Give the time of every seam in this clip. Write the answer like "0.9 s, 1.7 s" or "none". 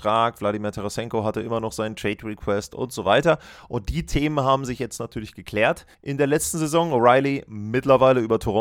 5.9 s